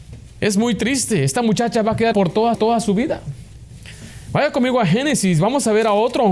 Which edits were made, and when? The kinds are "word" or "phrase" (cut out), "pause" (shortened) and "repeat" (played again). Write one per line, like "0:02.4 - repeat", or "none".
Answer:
0:02.1 - word
0:02.5 - repeat